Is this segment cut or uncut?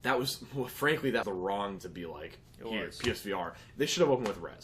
cut